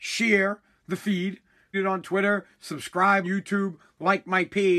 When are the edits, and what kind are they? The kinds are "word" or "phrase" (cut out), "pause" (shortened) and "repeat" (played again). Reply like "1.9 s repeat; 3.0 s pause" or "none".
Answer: 1.7 s word; 3.2 s word